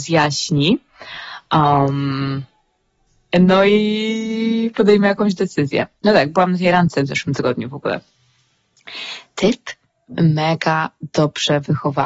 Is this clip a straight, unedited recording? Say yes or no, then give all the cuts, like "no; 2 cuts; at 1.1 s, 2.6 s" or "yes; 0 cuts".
yes; 0 cuts